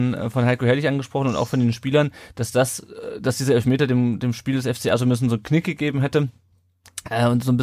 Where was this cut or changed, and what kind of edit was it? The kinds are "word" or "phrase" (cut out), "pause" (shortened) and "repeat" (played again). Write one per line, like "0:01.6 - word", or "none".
none